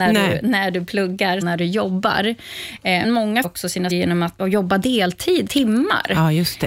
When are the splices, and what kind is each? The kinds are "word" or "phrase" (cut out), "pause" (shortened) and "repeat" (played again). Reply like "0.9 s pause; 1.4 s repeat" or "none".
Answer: 1.4 s word; 3.0 s word; 3.4 s word; 3.9 s word; 4.4 s word; 5.5 s word